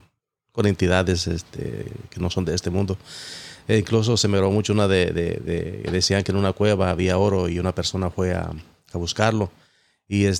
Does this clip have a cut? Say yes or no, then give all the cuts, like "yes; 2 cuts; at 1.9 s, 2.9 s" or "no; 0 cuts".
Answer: no; 0 cuts